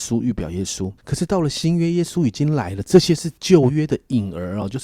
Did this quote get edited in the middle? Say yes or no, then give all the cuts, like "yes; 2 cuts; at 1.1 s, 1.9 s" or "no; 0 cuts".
yes; 1 cut; at 1.0 s